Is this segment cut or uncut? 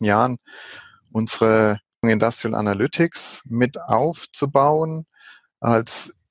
cut